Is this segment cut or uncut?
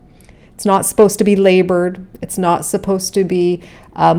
uncut